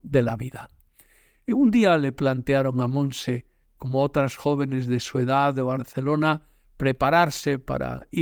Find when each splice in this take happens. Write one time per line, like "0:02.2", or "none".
none